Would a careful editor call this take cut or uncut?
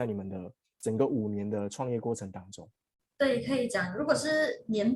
uncut